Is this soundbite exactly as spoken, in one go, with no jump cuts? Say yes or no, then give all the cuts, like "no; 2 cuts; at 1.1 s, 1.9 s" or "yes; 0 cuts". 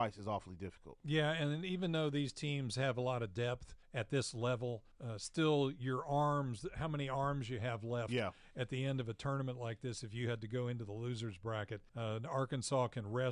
no; 3 cuts; at 3.8 s, 4.9 s, 11.9 s